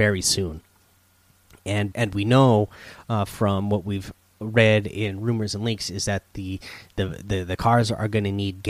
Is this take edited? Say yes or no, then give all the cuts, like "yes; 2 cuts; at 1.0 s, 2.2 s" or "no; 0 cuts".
yes; 1 cut; at 1.9 s